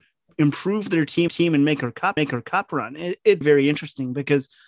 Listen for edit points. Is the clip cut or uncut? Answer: cut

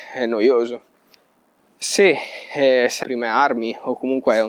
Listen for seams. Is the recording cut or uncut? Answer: cut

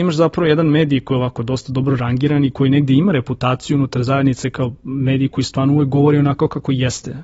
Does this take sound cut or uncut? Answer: uncut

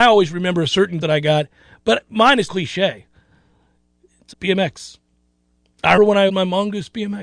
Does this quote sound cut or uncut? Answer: cut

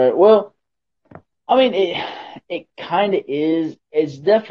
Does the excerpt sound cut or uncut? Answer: uncut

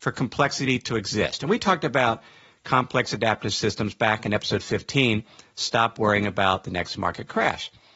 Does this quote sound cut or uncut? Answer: uncut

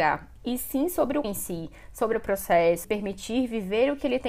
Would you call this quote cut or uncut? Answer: cut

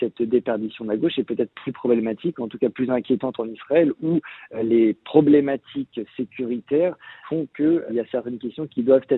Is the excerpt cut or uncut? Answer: cut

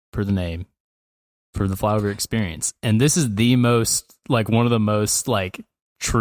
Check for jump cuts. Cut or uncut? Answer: uncut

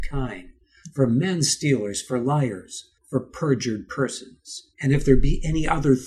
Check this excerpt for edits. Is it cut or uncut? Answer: cut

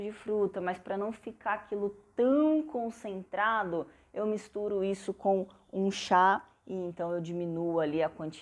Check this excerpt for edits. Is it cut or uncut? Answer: uncut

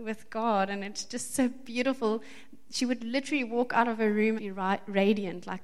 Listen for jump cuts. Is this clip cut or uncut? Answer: cut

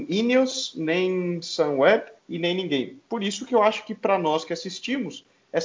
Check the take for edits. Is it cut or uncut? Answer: cut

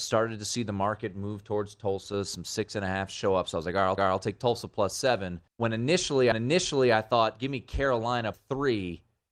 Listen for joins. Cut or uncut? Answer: cut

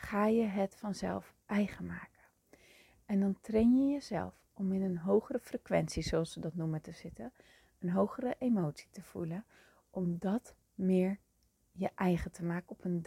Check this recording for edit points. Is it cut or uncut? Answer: uncut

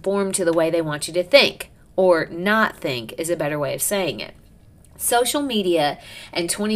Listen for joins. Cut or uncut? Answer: uncut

